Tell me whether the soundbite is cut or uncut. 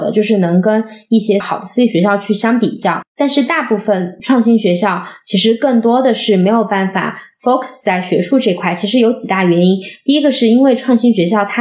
cut